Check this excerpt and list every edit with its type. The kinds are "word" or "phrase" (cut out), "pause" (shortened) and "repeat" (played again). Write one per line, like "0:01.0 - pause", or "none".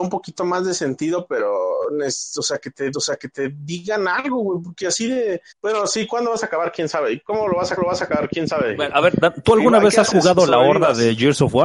0:02.9 - repeat
0:05.5 - pause
0:07.8 - repeat